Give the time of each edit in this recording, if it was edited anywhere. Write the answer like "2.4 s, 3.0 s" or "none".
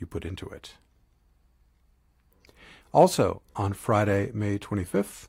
none